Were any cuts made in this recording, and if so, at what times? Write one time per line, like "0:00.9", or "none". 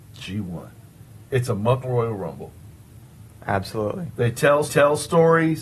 0:01.2
0:01.8
0:04.7